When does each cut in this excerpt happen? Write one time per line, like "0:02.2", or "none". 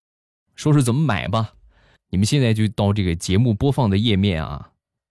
none